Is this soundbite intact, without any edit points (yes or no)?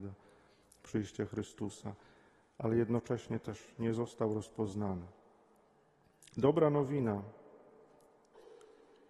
yes